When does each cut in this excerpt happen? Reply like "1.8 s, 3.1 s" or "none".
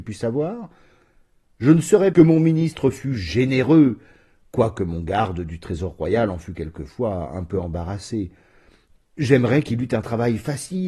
2.1 s